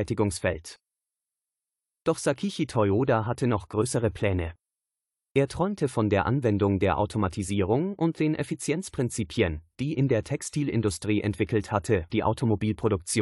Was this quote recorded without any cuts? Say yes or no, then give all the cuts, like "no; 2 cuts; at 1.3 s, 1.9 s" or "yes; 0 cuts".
no; 2 cuts; at 10.0 s, 12.1 s